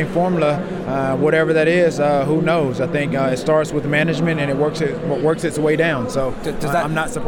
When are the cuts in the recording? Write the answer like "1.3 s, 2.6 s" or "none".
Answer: none